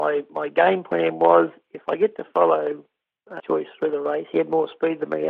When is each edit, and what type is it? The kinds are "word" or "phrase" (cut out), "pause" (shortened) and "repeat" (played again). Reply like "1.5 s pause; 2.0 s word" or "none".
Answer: 3.4 s word